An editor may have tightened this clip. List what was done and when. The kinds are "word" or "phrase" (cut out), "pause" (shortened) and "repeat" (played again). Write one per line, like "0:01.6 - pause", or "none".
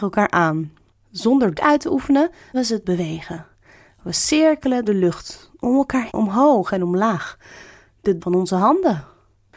0:01.5 - word
0:02.5 - word
0:02.8 - word
0:04.8 - word
0:06.1 - word
0:08.2 - word